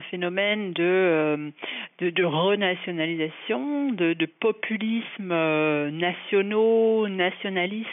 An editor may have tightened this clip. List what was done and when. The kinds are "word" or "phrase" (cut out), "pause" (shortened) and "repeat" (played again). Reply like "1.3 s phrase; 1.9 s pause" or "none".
none